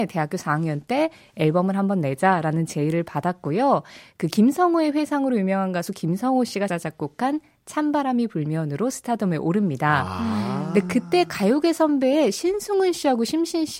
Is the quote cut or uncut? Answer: cut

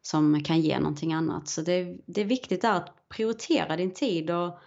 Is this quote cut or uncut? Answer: uncut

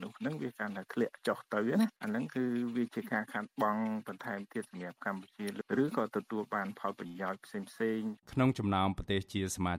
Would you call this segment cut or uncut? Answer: cut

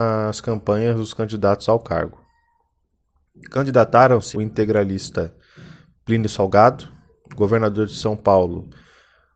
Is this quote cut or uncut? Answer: cut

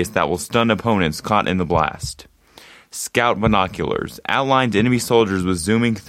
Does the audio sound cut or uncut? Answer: uncut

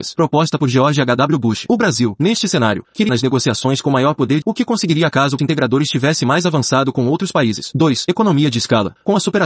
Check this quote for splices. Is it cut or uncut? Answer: cut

